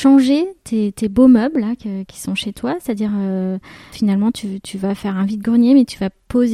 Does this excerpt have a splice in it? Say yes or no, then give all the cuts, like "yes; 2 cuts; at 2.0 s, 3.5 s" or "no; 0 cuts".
no; 0 cuts